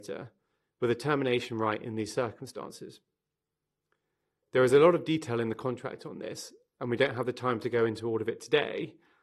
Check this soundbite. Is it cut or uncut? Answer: uncut